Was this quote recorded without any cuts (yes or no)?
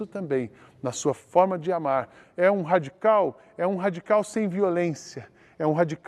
yes